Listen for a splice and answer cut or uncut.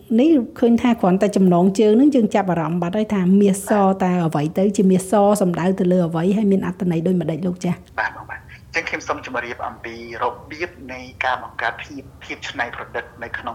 cut